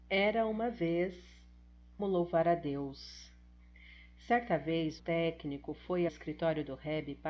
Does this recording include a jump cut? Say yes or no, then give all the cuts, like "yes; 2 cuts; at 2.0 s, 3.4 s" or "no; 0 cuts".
yes; 3 cuts; at 2.0 s, 5.0 s, 6.1 s